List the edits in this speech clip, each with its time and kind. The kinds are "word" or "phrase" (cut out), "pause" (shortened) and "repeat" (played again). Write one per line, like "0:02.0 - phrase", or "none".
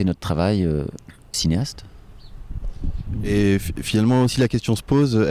0:01.3 - word
0:04.3 - word